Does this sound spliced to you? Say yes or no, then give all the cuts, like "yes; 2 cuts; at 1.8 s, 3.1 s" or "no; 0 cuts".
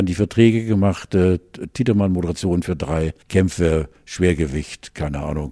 yes; 1 cut; at 3.2 s